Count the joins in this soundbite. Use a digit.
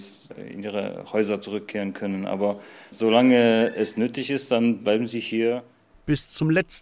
0